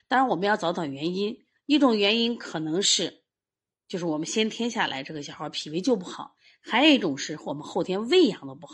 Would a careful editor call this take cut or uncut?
uncut